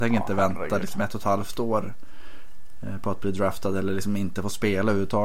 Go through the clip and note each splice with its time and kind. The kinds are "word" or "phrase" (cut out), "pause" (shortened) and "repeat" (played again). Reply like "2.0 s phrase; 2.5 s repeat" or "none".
none